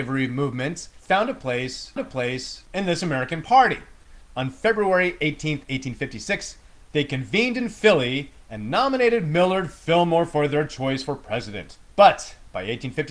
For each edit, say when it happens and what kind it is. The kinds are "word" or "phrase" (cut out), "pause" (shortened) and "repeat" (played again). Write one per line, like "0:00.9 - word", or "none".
0:02.0 - repeat
0:11.9 - pause